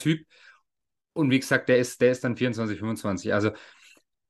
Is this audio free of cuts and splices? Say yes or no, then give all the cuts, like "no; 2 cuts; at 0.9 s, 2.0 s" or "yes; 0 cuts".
yes; 0 cuts